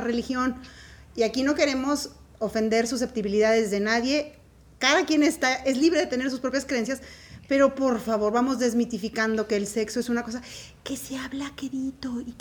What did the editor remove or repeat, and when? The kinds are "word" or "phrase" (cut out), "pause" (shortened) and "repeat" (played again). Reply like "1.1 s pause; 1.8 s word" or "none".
none